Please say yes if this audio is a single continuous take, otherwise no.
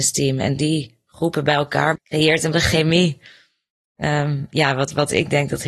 no